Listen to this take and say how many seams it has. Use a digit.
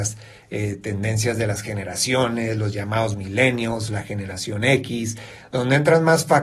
0